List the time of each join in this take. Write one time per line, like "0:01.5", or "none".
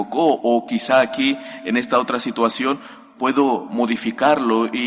none